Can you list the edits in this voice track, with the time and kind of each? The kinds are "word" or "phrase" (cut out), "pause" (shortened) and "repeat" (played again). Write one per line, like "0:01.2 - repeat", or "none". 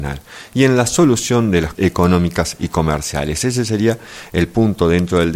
0:01.7 - word